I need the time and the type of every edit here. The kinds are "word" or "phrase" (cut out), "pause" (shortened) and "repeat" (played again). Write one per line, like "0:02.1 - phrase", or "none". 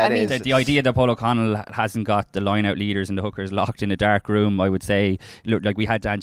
0:02.3 - word